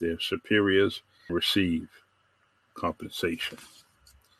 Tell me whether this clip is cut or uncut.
cut